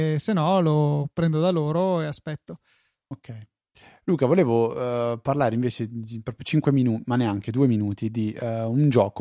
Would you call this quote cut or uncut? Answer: uncut